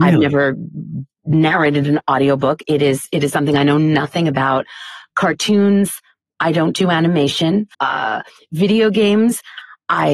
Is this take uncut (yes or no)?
no